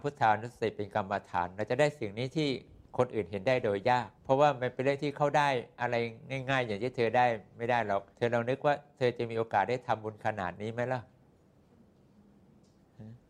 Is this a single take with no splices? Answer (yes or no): no